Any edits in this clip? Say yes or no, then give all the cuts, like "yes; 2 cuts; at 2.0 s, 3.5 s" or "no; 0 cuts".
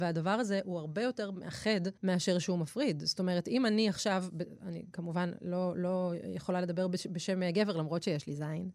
yes; 1 cut; at 2.0 s